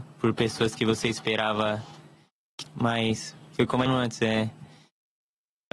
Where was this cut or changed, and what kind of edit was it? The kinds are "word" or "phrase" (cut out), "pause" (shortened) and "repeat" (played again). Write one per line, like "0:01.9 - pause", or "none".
0:02.7 - word
0:03.9 - phrase